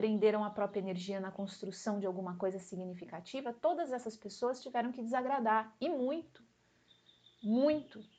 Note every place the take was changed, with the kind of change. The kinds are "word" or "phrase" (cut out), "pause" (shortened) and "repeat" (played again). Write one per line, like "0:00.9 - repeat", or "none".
none